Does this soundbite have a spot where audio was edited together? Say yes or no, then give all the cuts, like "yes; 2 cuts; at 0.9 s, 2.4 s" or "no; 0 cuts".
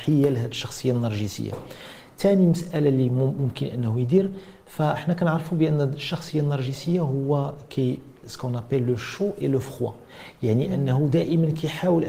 yes; 1 cut; at 8.2 s